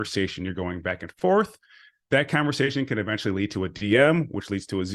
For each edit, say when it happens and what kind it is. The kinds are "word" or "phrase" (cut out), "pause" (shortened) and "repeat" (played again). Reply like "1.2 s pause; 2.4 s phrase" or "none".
none